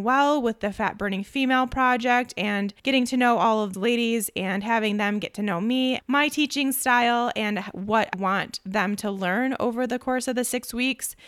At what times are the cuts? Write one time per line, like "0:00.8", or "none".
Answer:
0:02.8
0:03.7
0:06.0
0:08.1

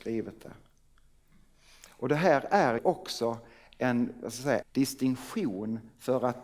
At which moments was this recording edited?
0:02.8
0:04.6

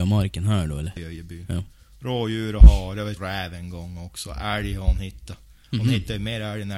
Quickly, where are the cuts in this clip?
0:01.0
0:03.2

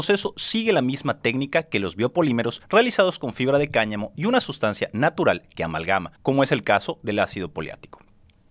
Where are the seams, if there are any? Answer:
0:02.6
0:06.2

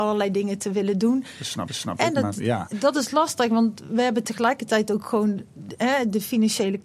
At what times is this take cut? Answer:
0:01.7

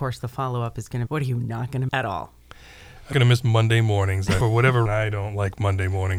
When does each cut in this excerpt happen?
0:01.1
0:01.9
0:03.1
0:04.4
0:04.9

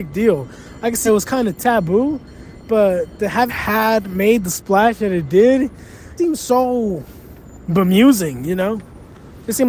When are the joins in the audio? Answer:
0:01.1
0:03.5
0:06.2

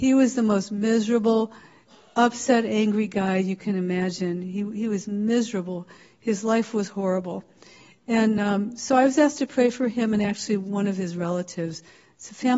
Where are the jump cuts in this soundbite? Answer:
none

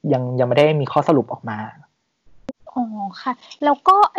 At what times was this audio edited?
0:02.6

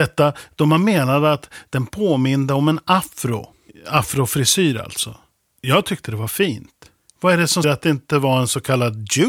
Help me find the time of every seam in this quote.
0:07.6

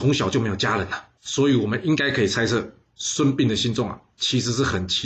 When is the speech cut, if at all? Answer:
0:01.2

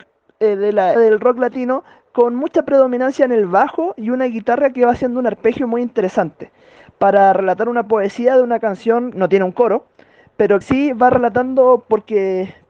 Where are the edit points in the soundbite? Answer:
0:00.9
0:09.1
0:10.6

